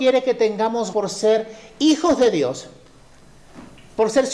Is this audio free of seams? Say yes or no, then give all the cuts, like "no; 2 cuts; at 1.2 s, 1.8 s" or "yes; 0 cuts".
no; 1 cut; at 0.9 s